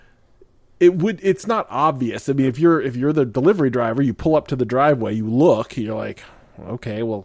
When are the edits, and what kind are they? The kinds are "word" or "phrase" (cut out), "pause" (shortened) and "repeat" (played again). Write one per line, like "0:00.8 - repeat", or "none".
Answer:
none